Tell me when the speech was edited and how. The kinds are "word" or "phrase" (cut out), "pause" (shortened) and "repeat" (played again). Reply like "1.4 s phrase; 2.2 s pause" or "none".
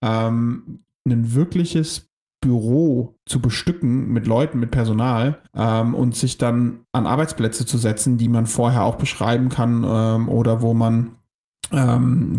3.2 s pause; 5.5 s pause